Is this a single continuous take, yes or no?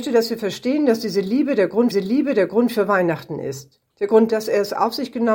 no